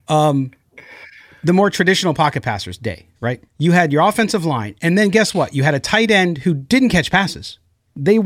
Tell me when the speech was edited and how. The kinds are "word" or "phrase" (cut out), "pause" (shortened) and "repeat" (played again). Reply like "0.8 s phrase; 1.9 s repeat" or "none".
3.5 s pause